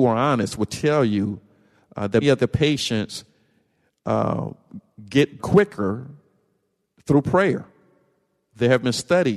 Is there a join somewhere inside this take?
yes; 2 cuts; at 2.2 s, 5.4 s

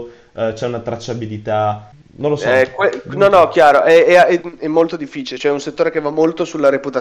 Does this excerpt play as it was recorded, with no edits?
yes; 0 cuts

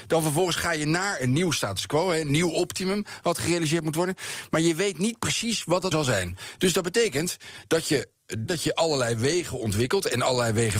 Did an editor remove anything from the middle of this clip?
yes; 2 cuts; at 5.9 s, 8.5 s

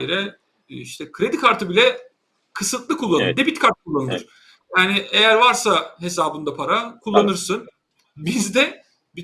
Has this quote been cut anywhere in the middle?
no; 0 cuts

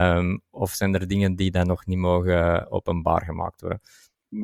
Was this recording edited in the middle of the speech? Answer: no; 0 cuts

